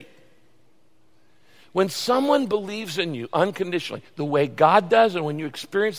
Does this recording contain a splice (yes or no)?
no